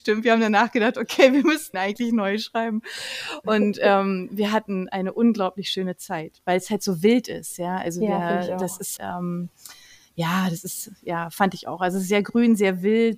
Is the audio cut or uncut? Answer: cut